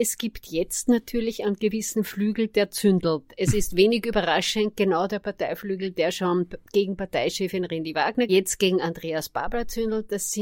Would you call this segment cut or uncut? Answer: cut